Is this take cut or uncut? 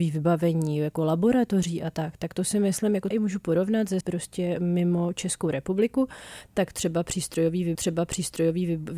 cut